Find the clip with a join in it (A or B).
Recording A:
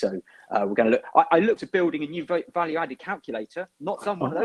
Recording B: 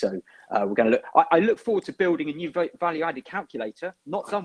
A